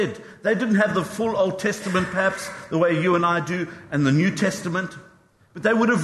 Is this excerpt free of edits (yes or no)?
yes